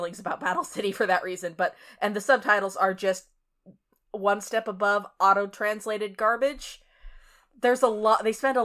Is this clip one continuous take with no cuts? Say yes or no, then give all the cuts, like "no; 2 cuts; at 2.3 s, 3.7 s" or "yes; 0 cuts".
yes; 0 cuts